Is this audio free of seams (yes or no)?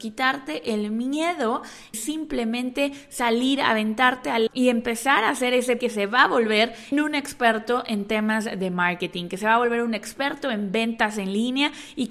no